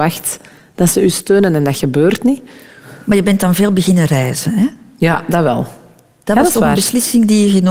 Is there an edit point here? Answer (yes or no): no